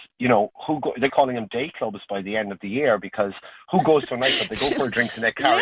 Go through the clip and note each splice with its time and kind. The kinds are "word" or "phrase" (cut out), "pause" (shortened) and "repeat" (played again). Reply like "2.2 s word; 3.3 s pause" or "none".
1.1 s phrase